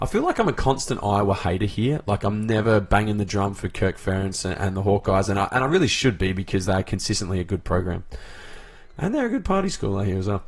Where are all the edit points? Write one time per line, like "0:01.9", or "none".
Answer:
none